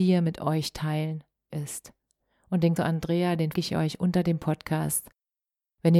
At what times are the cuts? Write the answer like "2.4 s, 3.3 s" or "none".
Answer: 1.5 s, 2.8 s, 3.5 s